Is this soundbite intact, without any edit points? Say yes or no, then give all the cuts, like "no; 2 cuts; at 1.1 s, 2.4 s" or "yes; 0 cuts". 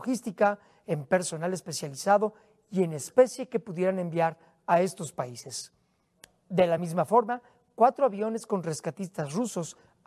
yes; 0 cuts